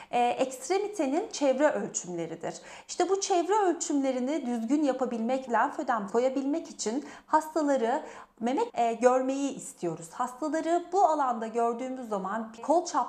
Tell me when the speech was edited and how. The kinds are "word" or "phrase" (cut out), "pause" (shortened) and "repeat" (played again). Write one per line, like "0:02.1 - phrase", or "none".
0:05.5 - phrase
0:06.1 - word
0:08.7 - phrase